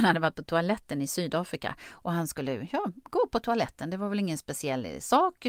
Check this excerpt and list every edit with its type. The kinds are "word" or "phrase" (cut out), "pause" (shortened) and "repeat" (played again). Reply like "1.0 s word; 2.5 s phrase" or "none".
none